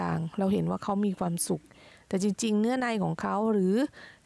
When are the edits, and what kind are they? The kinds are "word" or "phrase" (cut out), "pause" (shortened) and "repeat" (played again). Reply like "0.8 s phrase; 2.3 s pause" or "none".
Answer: none